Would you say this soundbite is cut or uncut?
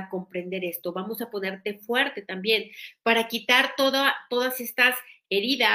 uncut